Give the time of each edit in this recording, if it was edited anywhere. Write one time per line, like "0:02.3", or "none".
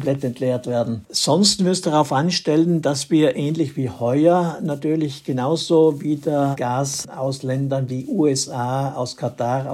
0:01.6